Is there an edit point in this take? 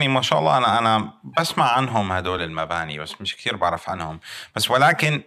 no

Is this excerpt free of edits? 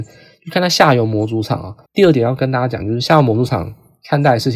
no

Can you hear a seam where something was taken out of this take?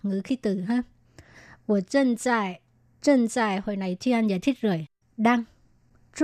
no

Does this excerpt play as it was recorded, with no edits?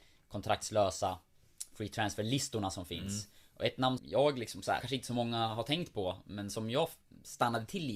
no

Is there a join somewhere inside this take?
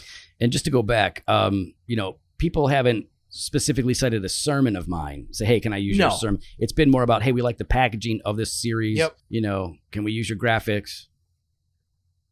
yes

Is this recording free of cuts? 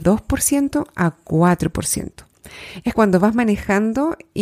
no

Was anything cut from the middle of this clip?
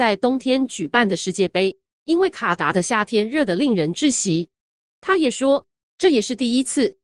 no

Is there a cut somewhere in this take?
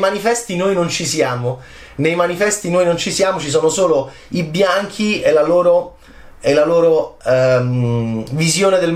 no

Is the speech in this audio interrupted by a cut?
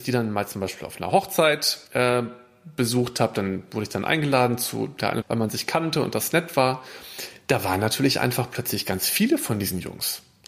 yes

